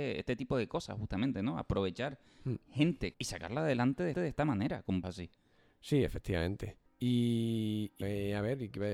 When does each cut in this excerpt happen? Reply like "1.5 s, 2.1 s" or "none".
3.1 s, 4.1 s, 5.0 s, 6.9 s, 8.0 s